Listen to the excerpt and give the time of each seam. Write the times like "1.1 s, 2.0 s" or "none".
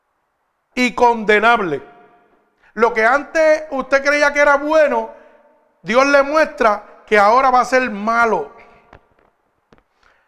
none